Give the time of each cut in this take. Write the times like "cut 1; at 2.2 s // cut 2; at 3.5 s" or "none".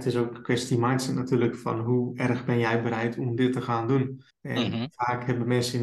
cut 1; at 4.3 s